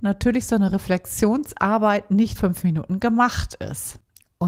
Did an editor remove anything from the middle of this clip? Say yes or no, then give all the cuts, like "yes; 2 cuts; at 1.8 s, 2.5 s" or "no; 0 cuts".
yes; 1 cut; at 2.4 s